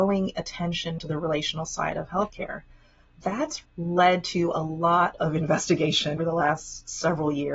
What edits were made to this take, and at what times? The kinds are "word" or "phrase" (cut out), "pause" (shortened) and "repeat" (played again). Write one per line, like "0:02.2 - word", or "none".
0:01.0 - word
0:03.6 - word
0:06.2 - word